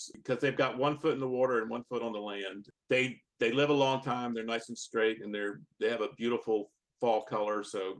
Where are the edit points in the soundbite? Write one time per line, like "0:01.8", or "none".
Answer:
none